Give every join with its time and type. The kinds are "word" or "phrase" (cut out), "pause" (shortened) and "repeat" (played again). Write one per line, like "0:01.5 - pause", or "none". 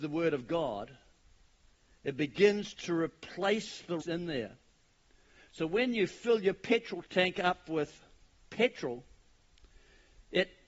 0:04.0 - phrase
0:07.1 - pause

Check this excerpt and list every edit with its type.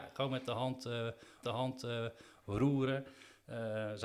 0:01.4 - repeat

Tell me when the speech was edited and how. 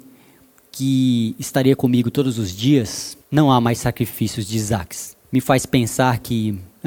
0:03.2 - pause
0:05.2 - pause

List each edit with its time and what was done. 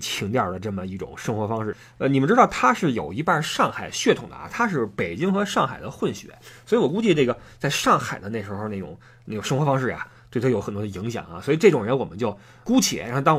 none

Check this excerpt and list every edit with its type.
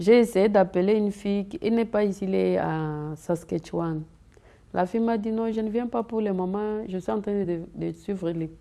none

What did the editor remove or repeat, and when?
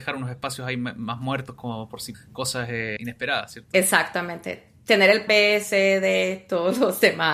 0:02.1 - word
0:05.3 - word

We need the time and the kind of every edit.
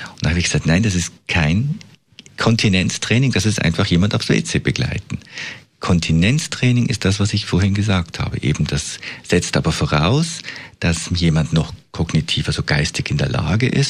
none

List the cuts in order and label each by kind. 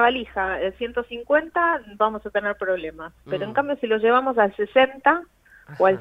none

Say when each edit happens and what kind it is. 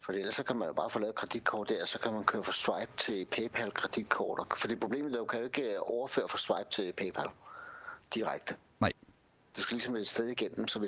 none

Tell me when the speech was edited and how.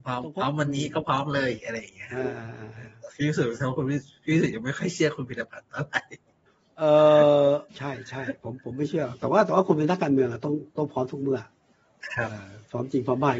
0:06.5 - pause
0:07.7 - pause

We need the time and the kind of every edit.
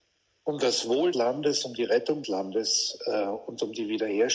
0:01.1 - word
0:02.2 - word

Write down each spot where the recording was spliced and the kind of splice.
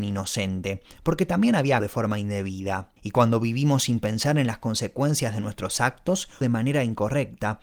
0:01.8 - word
0:03.0 - pause
0:06.4 - word

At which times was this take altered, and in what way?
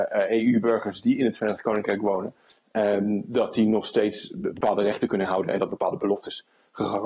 none

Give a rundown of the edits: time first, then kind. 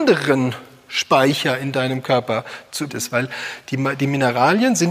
0:02.9 - word

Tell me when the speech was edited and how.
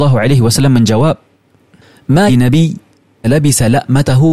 0:02.3 - word
0:03.2 - word

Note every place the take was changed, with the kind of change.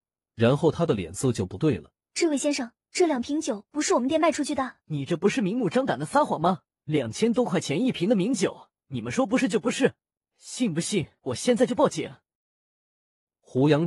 0:02.0 - pause
0:02.8 - pause
0:04.8 - pause
0:06.7 - pause
0:08.8 - pause
0:10.2 - pause

